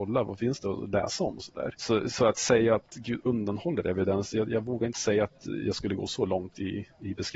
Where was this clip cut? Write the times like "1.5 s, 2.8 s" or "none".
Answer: 1.7 s